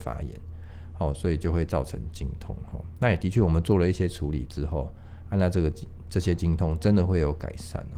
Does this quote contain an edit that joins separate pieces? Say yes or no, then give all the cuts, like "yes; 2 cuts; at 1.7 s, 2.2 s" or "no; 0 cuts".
no; 0 cuts